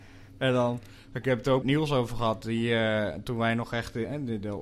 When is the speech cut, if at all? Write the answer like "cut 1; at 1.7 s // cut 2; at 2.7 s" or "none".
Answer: cut 1; at 1.6 s